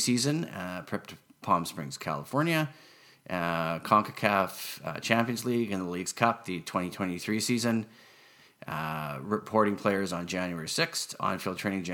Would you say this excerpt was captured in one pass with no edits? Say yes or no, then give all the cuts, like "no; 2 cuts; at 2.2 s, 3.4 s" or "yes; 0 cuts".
yes; 0 cuts